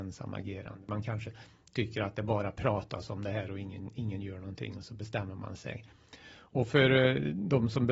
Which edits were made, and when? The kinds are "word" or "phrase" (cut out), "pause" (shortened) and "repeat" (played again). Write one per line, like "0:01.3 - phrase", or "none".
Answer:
none

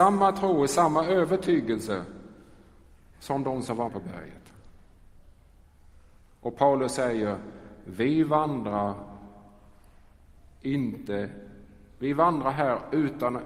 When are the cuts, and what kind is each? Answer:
0:03.9 - word

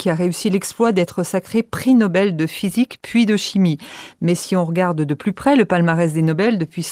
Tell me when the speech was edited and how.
none

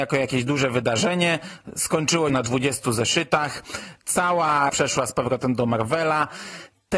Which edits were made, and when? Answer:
0:02.3 - word
0:04.7 - word

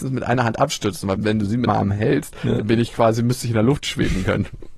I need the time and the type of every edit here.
0:01.7 - word

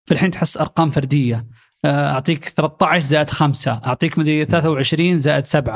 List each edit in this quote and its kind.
none

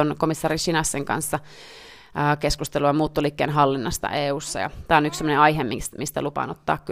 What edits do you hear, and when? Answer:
none

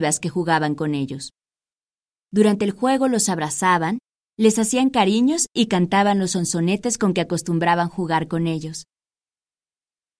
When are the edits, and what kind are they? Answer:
none

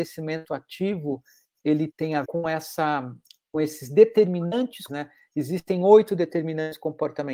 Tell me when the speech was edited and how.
0:01.9 - word
0:02.2 - word
0:04.9 - word

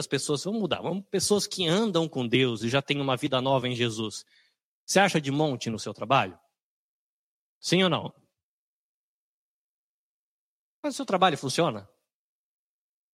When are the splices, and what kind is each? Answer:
none

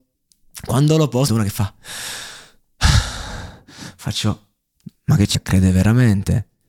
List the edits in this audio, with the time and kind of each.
0:01.3 - word
0:05.3 - word

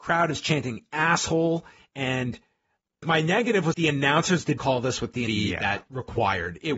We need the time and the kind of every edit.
0:03.0 - word
0:03.7 - word
0:04.6 - word
0:05.3 - word
0:05.9 - word

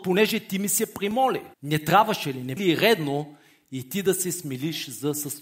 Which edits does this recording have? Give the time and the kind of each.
0:01.5 - pause
0:02.6 - word

